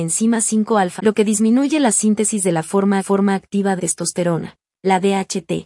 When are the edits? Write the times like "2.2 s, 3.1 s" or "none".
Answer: 1.0 s, 3.0 s, 3.8 s